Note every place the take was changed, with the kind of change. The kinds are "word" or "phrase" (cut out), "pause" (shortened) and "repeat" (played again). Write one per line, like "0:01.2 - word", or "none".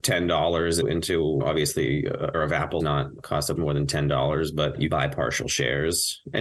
0:02.3 - word
0:02.8 - word
0:03.6 - word
0:04.9 - word